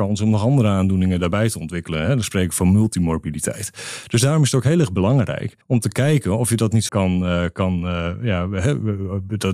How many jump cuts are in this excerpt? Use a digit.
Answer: 2